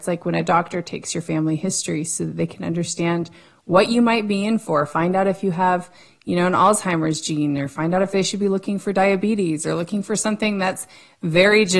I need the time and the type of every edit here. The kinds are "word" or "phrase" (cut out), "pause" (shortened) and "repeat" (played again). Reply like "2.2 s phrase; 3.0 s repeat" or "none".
none

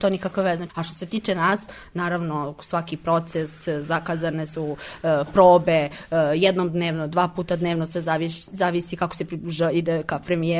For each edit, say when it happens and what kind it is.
none

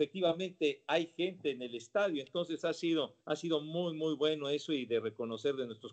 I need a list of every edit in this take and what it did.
3.2 s pause

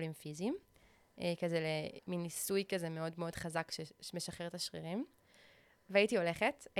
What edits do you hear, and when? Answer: none

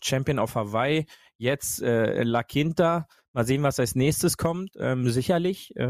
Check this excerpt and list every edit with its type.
none

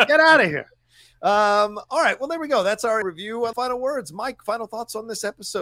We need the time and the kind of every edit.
3.0 s word; 3.5 s phrase

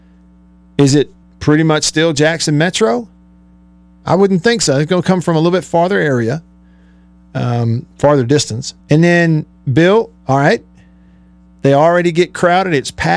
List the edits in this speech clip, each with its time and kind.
1.2 s pause; 8.8 s pause

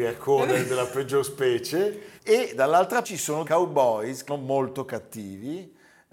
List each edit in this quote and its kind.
2.2 s pause; 3.0 s word; 3.4 s word; 4.3 s word

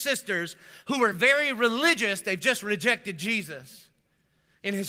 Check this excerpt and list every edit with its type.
none

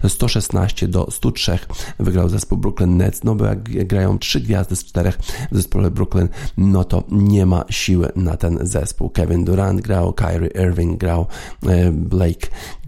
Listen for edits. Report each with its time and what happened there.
4.2 s word

